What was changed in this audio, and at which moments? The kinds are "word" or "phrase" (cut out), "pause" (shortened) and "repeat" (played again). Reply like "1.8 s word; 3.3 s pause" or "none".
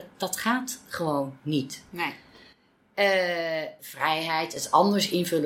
3.8 s word